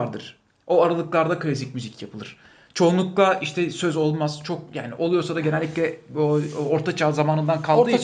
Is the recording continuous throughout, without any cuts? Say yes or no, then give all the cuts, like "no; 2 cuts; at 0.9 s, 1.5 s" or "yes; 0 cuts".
yes; 0 cuts